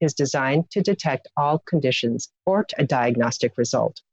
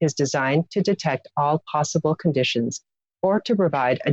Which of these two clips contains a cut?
first; 3 cuts; at 1.6 s, 2.4 s, 2.7 s

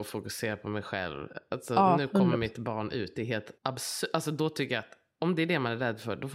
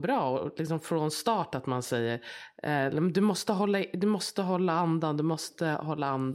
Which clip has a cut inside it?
first; 1 cut; at 3.6 s

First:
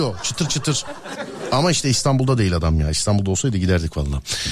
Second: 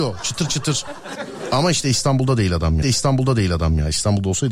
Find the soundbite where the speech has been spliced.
second; 1 cut; at 2.8 s

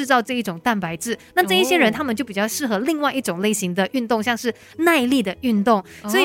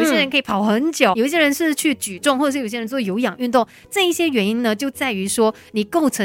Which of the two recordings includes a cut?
second; 1 cut; at 1.1 s

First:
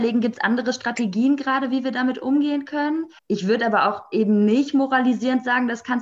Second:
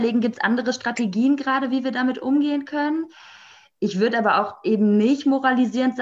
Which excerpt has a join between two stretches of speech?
first; 1 cut; at 3.2 s

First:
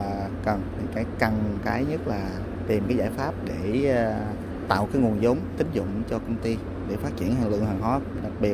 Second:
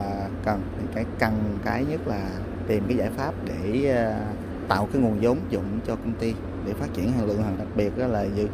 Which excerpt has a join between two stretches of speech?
second; 2 cuts; at 5.5 s, 7.6 s

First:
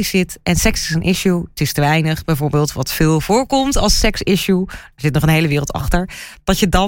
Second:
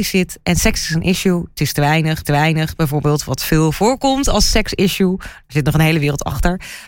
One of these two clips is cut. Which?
second; 1 cut; at 2.2 s

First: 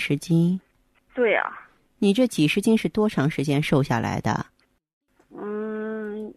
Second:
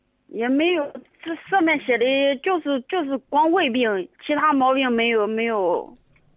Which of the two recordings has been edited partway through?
second; 1 cut; at 4.2 s

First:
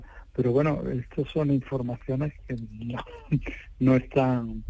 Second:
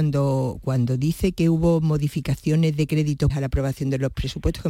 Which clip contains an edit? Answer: second; 1 cut; at 3.3 s

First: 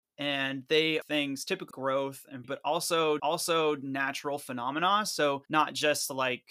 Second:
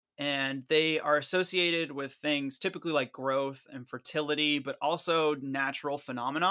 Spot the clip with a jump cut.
first; 5 cuts; at 1.0 s, 1.7 s, 2.4 s, 3.2 s, 5.4 s

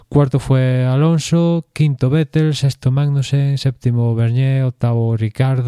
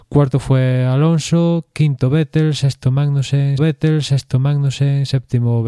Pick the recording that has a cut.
second; 1 cut; at 3.6 s

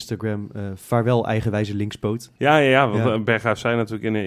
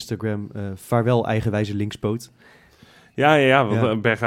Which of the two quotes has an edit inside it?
first; 1 cut; at 2.4 s

